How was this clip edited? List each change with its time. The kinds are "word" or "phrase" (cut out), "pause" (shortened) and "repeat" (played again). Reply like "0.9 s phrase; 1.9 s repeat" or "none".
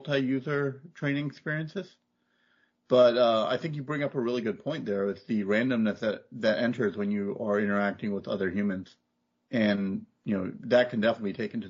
none